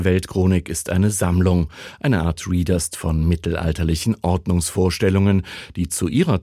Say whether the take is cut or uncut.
cut